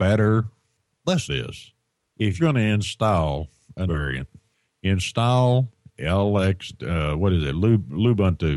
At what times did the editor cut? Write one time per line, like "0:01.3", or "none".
0:01.3
0:02.4
0:03.9